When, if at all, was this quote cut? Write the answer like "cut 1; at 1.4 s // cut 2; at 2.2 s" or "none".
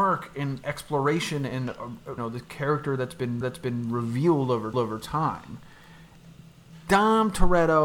cut 1; at 2.2 s // cut 2; at 3.4 s // cut 3; at 4.7 s